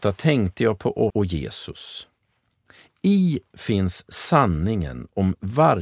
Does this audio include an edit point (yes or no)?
yes